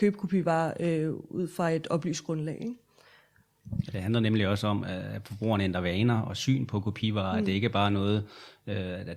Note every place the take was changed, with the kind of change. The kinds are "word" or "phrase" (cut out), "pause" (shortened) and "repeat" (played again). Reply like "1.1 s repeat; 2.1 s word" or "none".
none